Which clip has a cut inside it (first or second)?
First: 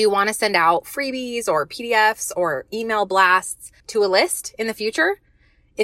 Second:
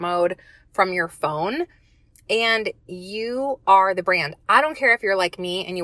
first